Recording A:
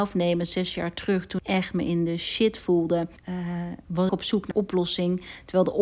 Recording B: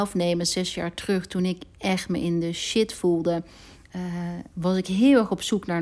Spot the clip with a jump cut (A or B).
A